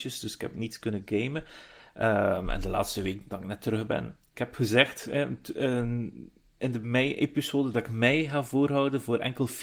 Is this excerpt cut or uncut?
uncut